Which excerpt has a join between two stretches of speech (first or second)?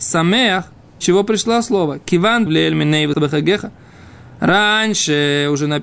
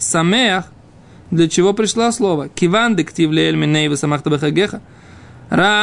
first